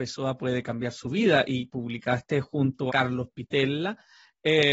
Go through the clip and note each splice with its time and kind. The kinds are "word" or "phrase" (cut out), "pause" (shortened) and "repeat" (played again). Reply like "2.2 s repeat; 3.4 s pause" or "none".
1.7 s word; 2.9 s word